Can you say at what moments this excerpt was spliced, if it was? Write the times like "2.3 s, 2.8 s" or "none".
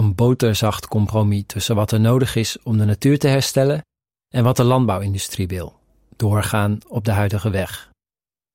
none